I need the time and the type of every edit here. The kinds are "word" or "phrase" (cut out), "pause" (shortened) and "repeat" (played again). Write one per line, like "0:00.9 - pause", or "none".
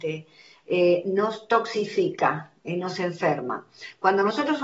none